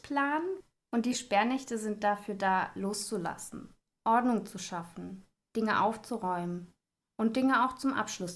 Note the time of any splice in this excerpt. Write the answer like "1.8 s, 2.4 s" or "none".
none

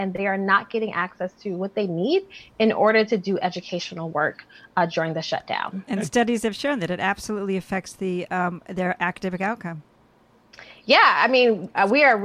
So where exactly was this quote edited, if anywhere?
none

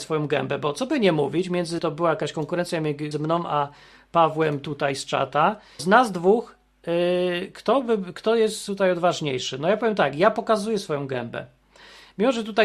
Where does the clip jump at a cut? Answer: 1.8 s, 3.1 s, 5.8 s

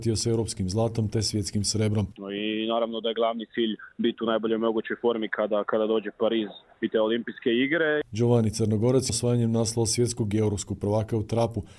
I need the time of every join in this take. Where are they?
3.9 s, 6.7 s, 9.1 s

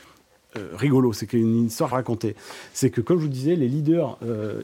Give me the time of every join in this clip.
1.9 s

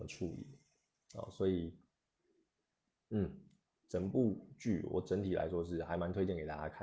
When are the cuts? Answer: none

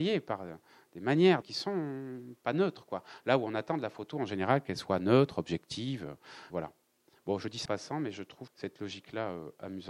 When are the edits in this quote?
1.4 s, 6.5 s, 7.7 s, 8.5 s

